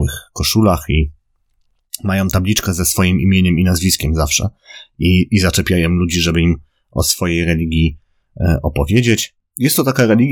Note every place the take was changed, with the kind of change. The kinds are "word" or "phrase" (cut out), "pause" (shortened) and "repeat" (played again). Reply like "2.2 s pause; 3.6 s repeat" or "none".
none